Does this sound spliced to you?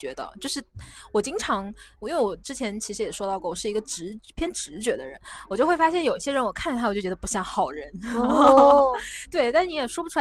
no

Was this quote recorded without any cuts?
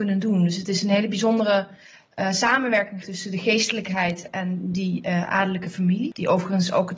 no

